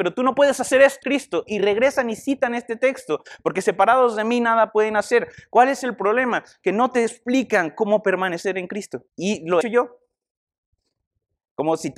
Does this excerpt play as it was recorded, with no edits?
no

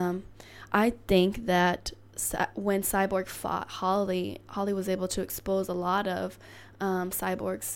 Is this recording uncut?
yes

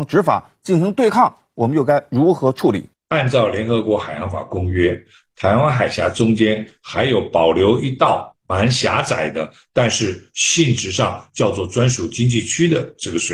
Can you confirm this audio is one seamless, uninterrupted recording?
yes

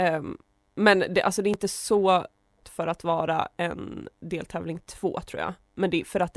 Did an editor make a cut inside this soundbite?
yes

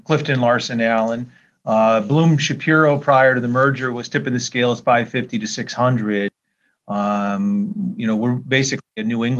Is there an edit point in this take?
no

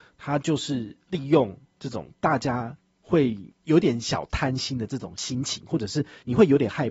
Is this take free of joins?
no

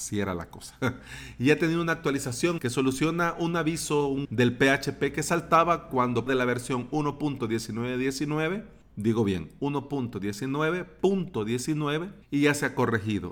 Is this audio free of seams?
no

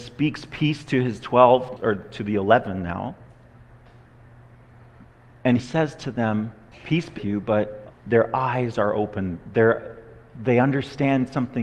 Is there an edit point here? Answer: yes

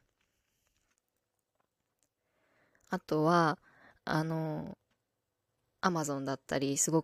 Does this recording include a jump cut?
no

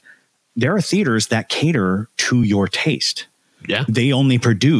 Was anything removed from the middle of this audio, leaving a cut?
no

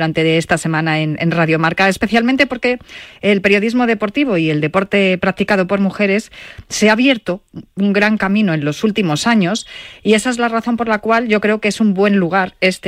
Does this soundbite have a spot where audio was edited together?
no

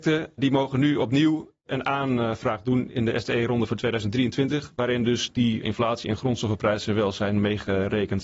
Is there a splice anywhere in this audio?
yes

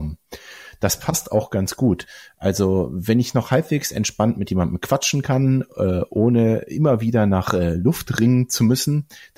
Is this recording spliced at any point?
no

